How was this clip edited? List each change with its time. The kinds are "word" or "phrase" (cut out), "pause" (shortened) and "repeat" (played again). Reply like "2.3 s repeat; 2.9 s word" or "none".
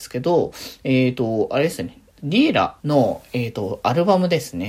2.8 s pause